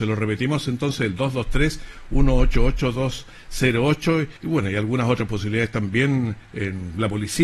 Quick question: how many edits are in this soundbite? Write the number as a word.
two